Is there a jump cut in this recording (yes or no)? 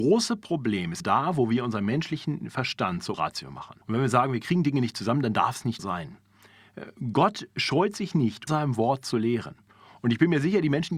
yes